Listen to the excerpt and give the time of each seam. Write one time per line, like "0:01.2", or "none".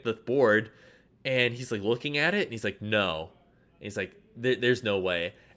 none